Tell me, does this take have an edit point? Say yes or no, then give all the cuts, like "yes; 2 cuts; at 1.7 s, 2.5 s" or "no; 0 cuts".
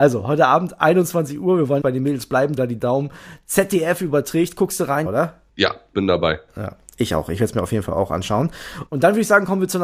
yes; 4 cuts; at 1.8 s, 2.6 s, 5.1 s, 5.9 s